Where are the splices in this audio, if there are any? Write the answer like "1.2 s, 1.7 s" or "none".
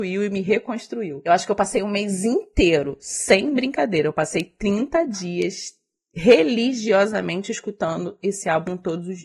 none